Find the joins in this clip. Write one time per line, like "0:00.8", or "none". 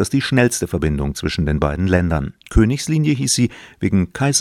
0:02.4